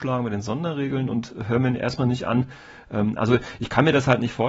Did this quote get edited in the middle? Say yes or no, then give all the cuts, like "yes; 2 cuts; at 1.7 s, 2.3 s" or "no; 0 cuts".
no; 0 cuts